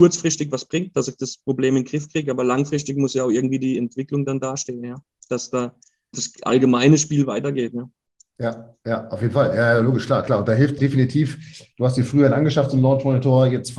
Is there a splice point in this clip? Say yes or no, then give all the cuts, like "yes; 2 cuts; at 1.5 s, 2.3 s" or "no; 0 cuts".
yes; 2 cuts; at 6.1 s, 10.8 s